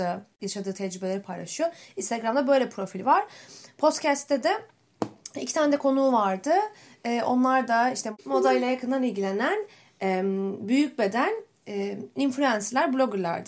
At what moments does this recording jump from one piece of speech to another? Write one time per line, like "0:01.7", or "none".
none